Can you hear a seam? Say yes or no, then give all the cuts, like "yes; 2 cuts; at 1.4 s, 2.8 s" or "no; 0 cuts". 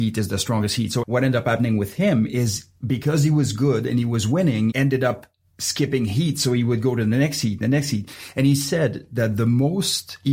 yes; 2 cuts; at 1.0 s, 4.7 s